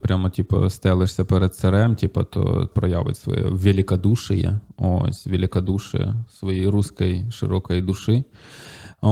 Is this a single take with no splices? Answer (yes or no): no